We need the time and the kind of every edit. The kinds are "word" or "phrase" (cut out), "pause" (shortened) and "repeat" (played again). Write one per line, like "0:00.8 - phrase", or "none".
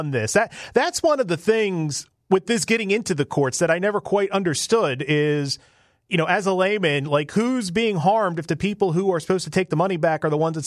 none